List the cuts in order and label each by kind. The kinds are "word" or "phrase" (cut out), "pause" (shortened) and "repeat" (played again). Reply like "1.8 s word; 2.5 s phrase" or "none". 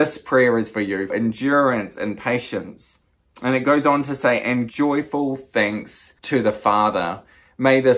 1.1 s word; 4.7 s word; 6.2 s pause